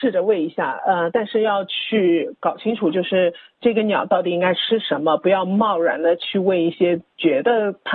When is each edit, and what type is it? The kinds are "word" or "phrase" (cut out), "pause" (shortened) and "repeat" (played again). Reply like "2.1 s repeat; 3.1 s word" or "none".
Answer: none